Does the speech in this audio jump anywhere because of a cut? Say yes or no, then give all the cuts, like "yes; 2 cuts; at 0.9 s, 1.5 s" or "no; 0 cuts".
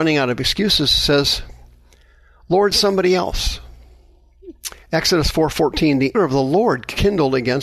yes; 3 cuts; at 2.7 s, 4.8 s, 6.1 s